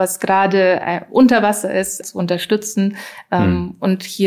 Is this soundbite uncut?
no; 1 cut; at 2.0 s

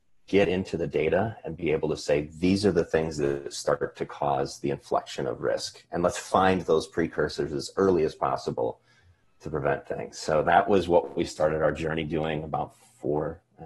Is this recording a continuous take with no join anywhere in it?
yes; 0 cuts

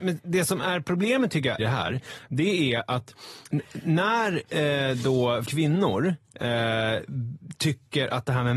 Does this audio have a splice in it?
yes; 2 cuts; at 1.6 s, 5.4 s

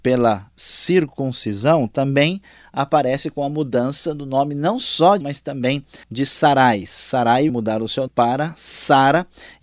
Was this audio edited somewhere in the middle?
yes; 4 cuts; at 5.2 s, 6.0 s, 7.5 s, 8.1 s

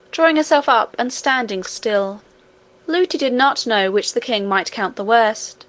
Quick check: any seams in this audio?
yes; 2 cuts; at 1.6 s, 2.5 s

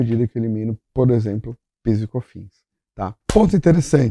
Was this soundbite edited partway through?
yes; 1 cut; at 3.2 s

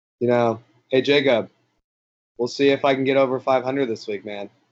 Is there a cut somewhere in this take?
no; 0 cuts

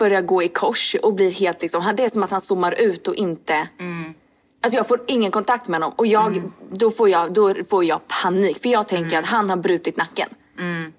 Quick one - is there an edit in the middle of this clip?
no; 0 cuts

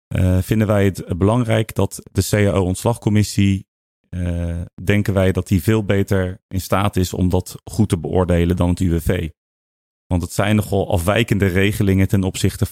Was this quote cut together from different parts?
no; 0 cuts

